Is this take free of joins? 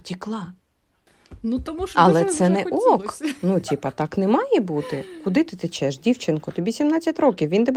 no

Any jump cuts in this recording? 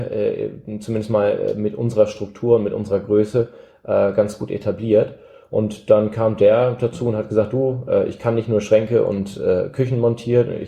no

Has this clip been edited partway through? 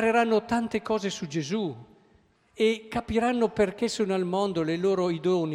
no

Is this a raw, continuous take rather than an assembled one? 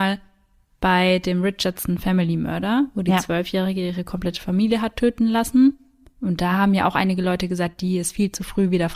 yes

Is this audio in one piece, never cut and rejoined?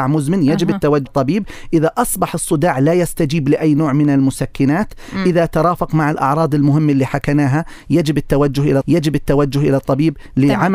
no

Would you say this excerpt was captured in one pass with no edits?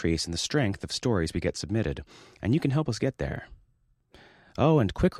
yes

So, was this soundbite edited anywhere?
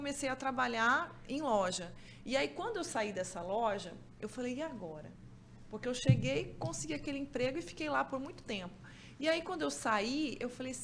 no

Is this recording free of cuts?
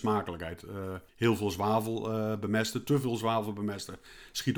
no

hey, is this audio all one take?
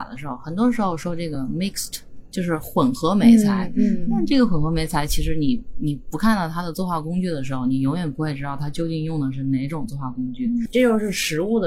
yes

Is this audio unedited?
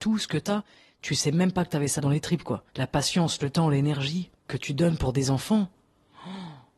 no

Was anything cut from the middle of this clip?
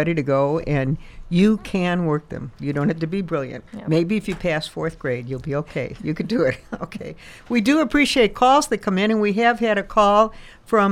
yes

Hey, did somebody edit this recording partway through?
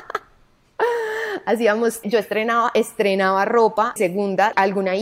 yes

